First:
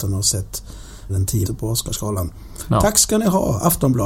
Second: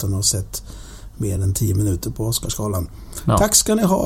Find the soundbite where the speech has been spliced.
first; 2 cuts; at 1.1 s, 1.5 s

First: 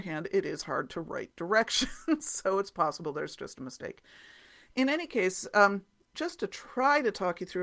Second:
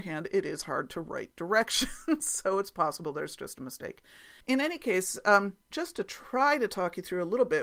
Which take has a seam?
second; 2 cuts; at 4.4 s, 5.6 s

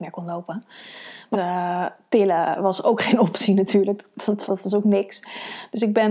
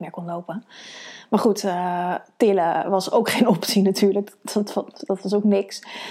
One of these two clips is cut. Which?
first; 2 cuts; at 1.3 s, 4.5 s

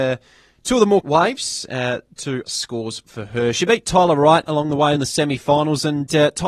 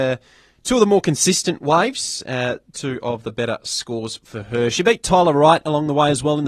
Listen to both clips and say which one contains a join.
first; 3 cuts; at 1.0 s, 2.4 s, 5.0 s

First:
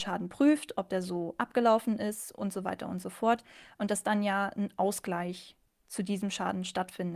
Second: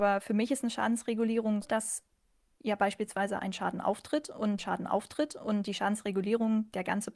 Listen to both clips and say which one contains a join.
second; 2 cuts; at 1.6 s, 4.6 s

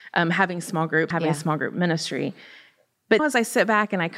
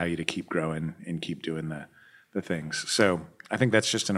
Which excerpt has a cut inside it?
first; 2 cuts; at 1.1 s, 3.2 s

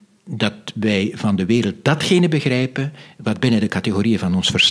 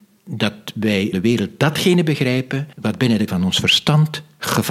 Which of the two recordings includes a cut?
second; 3 cuts; at 1.1 s, 2.7 s, 3.3 s

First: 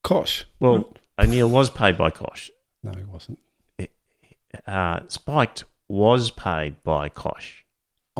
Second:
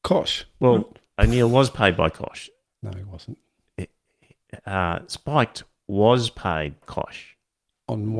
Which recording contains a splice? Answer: second; 1 cut; at 6.8 s

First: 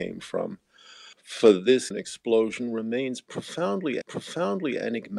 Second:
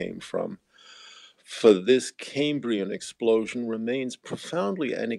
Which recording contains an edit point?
first; 3 cuts; at 1.1 s, 1.9 s, 4.0 s

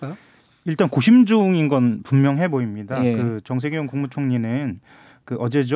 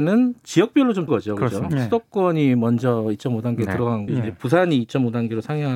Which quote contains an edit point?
second; 2 cuts; at 1.1 s, 4.1 s

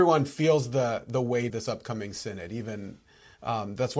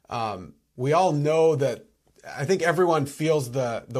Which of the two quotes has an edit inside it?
first; 1 cut; at 1.5 s

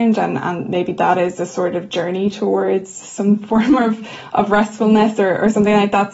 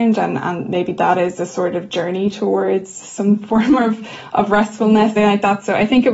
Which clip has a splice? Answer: second; 1 cut; at 5.2 s

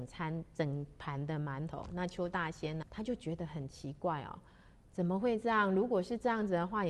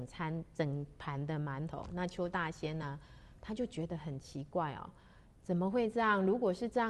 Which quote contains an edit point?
first; 1 cut; at 2.8 s

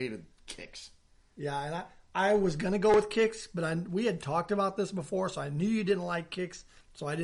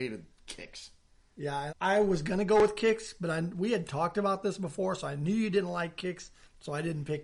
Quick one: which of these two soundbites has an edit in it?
second; 1 cut; at 1.7 s

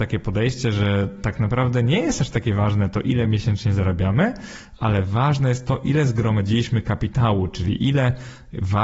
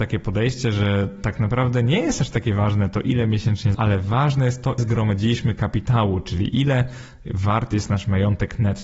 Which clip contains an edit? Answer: second; 2 cuts; at 3.7 s, 4.8 s

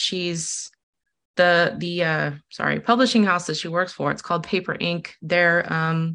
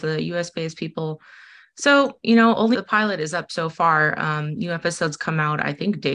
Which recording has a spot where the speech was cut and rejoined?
second; 1 cut; at 2.7 s

